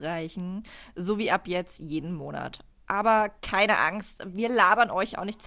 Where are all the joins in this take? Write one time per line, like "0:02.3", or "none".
none

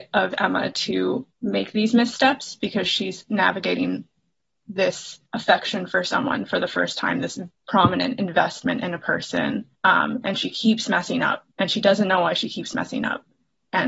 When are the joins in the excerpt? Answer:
0:01.3
0:05.3
0:07.5
0:09.7
0:11.5

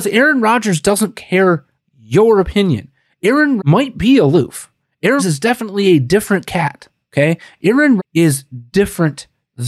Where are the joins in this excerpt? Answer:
0:01.8
0:03.6
0:05.2
0:08.0

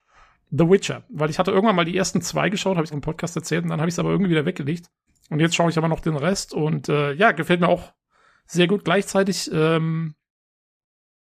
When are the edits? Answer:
0:02.9
0:05.1

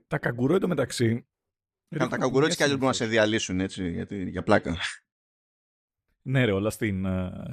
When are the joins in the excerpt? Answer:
none

